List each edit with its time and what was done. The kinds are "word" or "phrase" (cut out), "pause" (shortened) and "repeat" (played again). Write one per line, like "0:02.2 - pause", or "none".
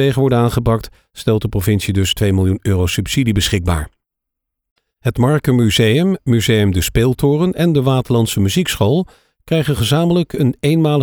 none

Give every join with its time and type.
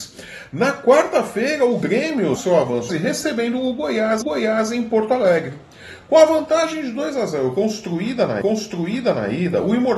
0:02.4 - phrase
0:02.9 - phrase
0:04.2 - repeat
0:08.4 - repeat

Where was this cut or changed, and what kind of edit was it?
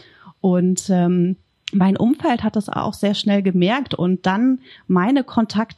0:01.5 - pause

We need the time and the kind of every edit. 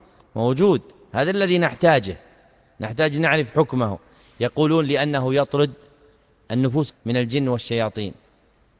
0:06.9 - word

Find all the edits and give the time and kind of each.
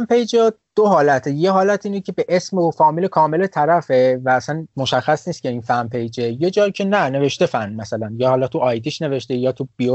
none

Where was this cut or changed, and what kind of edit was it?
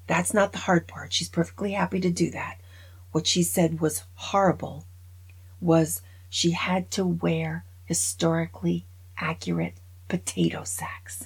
none

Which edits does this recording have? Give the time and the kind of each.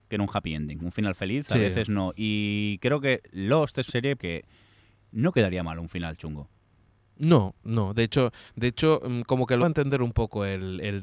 0:03.9 - word
0:04.2 - word
0:09.6 - word

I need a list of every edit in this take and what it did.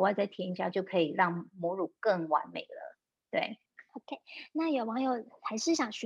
0:03.7 - pause

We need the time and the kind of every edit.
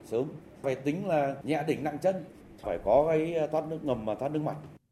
none

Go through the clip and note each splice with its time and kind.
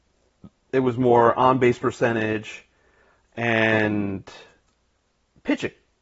none

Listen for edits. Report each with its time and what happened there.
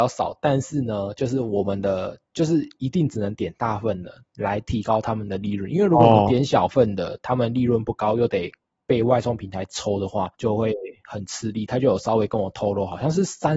0:10.3 - word

